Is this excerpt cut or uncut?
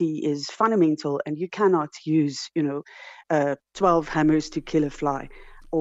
cut